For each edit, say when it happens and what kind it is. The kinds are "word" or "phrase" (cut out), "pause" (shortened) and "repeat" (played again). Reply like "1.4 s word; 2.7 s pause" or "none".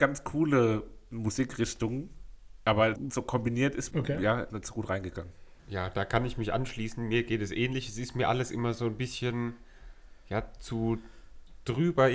3.0 s word; 3.9 s phrase; 4.5 s word; 5.6 s pause